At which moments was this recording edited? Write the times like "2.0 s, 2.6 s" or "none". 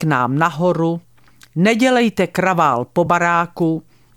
none